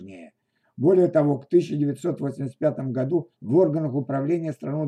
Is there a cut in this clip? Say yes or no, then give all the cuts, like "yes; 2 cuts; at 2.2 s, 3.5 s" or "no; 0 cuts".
yes; 1 cut; at 3.3 s